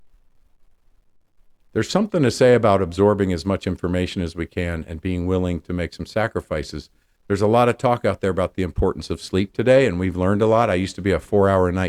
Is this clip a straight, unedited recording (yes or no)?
yes